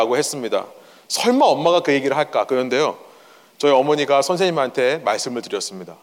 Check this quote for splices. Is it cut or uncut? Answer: uncut